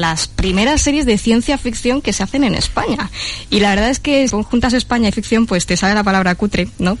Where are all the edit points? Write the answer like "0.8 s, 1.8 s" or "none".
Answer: 4.3 s, 5.1 s